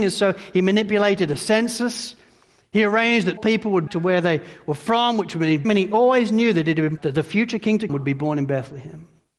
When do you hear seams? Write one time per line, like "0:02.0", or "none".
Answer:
0:03.4
0:03.9
0:05.6
0:07.0
0:07.9